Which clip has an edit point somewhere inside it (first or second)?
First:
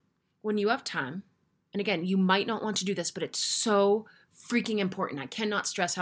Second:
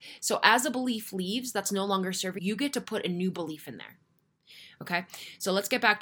second